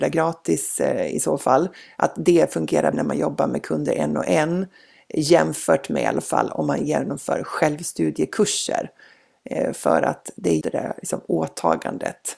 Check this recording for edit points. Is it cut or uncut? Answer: cut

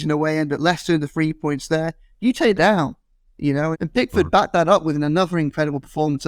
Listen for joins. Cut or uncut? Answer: cut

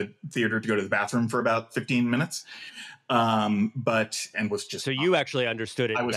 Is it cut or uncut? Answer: cut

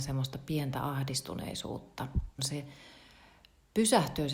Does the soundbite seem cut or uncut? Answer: cut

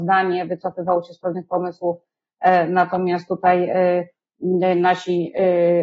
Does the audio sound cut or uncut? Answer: uncut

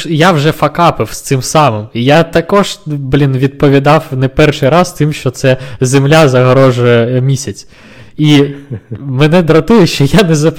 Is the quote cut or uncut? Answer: uncut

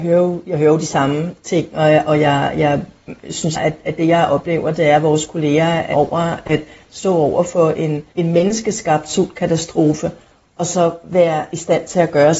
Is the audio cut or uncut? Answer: cut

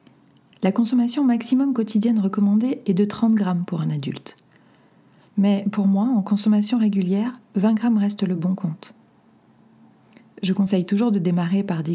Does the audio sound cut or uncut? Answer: uncut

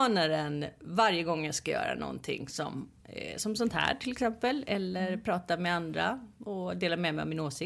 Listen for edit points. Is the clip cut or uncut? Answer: uncut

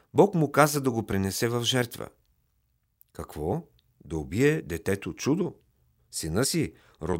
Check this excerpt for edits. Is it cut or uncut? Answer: uncut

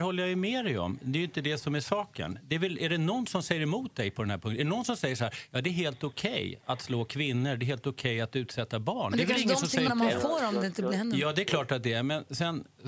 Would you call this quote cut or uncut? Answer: cut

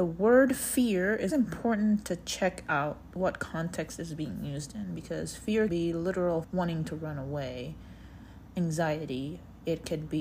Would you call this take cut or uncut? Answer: cut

